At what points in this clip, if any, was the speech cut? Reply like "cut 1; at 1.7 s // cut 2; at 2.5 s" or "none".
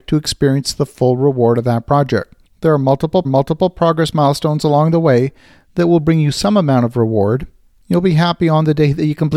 cut 1; at 2.4 s // cut 2; at 3.2 s